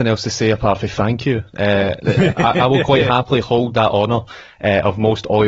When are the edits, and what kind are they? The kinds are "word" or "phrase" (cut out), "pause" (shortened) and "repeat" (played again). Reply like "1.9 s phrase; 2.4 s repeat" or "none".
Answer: none